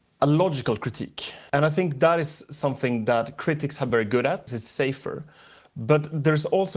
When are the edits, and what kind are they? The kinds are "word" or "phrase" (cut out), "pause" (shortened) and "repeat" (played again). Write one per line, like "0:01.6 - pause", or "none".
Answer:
0:01.5 - pause
0:03.9 - word
0:04.5 - word